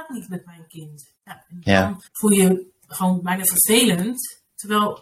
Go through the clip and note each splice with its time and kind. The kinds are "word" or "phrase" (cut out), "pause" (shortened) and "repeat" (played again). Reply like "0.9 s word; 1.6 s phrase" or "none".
2.1 s pause